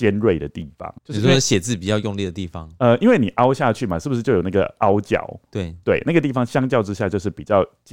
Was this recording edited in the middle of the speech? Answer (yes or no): yes